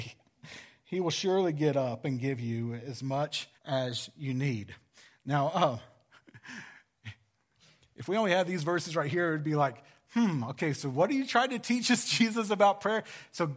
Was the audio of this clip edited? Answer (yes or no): yes